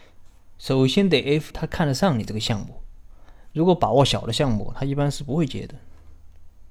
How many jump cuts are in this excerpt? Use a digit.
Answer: 1